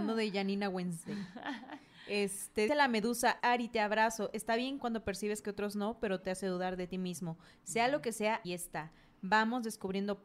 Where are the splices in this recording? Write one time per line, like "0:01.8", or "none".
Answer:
0:02.7
0:03.4
0:04.8
0:05.4
0:06.2
0:08.4